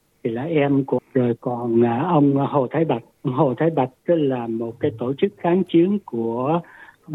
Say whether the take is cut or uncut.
cut